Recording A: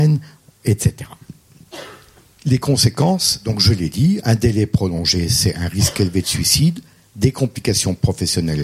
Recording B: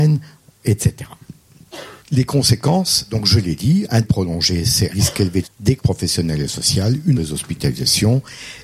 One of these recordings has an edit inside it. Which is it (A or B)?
B